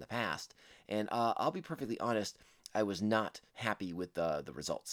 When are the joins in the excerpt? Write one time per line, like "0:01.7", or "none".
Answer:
0:03.5